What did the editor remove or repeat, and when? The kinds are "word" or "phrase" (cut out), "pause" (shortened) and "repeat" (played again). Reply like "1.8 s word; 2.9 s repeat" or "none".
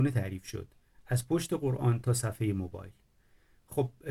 none